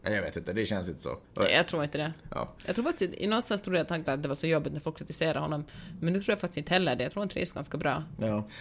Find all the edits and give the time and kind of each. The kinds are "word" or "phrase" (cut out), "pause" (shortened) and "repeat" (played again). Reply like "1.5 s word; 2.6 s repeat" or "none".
1.2 s pause; 4.1 s phrase